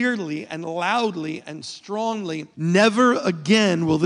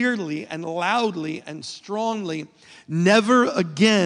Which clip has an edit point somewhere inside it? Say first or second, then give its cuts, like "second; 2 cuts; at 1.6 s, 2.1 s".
first; 1 cut; at 2.5 s